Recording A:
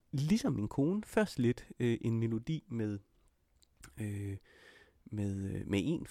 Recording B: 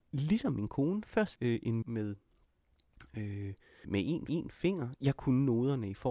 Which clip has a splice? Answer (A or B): B